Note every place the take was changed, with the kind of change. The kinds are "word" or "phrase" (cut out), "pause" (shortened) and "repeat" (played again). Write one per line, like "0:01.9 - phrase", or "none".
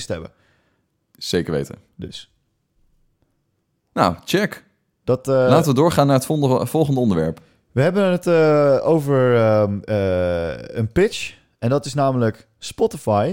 none